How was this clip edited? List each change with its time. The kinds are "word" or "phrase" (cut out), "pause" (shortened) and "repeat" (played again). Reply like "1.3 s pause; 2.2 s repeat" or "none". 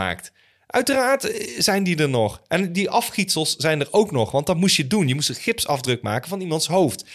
none